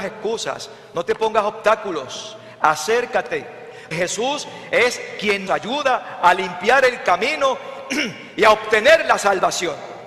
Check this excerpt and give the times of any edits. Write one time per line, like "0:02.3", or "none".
0:03.9
0:05.5